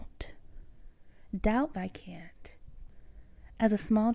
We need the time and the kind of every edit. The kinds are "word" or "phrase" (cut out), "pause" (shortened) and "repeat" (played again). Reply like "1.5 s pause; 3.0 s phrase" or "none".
1.7 s phrase